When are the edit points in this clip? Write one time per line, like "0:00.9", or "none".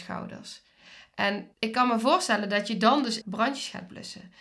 0:01.5
0:03.2